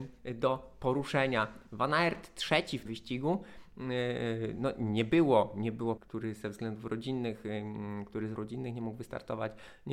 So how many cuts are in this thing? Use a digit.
3